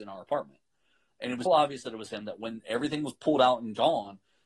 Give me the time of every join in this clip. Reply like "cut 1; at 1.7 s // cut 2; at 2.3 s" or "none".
cut 1; at 1.5 s

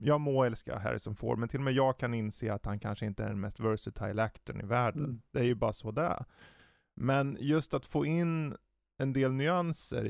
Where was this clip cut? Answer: none

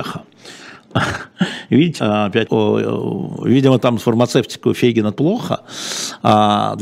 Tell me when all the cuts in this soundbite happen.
cut 1; at 2.0 s // cut 2; at 2.5 s // cut 3; at 4.0 s // cut 4; at 5.1 s

